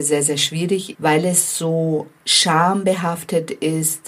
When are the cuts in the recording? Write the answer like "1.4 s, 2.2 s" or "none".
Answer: 0.9 s